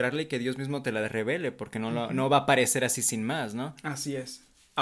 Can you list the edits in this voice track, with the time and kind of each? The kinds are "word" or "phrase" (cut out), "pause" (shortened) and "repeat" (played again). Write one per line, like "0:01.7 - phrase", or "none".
none